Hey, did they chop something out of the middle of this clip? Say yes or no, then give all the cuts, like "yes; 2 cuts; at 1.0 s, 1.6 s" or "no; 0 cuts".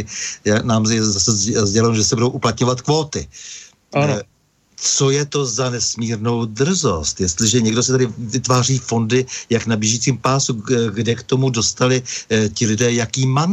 no; 0 cuts